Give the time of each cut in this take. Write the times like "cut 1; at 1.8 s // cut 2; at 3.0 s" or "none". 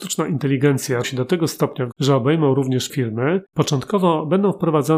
cut 1; at 1.0 s // cut 2; at 1.9 s // cut 3; at 2.9 s